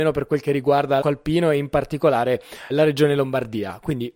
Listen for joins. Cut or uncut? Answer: cut